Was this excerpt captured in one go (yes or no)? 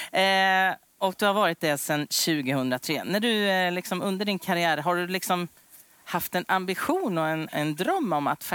yes